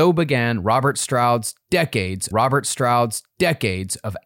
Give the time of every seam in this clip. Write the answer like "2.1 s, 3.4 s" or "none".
2.3 s